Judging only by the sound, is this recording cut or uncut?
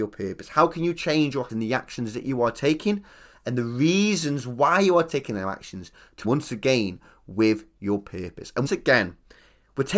cut